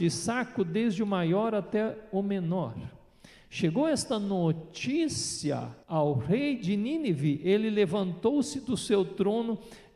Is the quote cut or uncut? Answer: cut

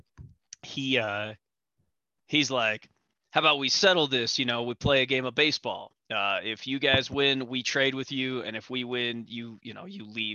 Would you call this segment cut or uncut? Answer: uncut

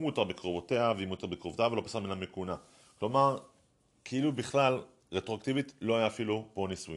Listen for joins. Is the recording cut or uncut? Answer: uncut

